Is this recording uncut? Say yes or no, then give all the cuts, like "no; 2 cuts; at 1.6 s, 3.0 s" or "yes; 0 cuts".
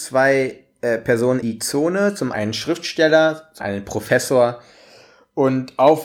no; 3 cuts; at 1.4 s, 2.3 s, 3.6 s